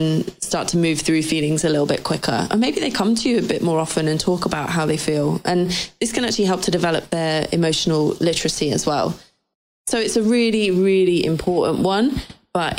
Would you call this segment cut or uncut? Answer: uncut